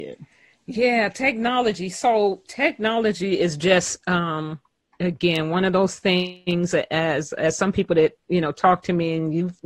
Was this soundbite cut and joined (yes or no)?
no